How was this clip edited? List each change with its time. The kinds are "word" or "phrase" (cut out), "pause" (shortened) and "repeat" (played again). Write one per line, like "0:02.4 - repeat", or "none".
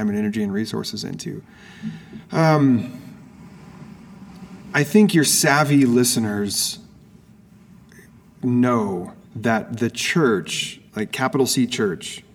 0:09.2 - pause
0:10.9 - pause